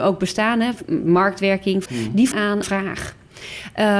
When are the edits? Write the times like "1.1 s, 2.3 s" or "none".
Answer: 1.9 s, 2.3 s, 2.6 s